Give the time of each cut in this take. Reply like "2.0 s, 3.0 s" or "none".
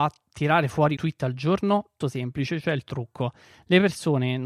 1.0 s, 2.0 s